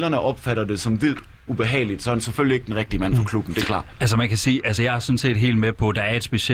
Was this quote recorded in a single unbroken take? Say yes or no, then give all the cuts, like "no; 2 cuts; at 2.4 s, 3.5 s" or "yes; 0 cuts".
yes; 0 cuts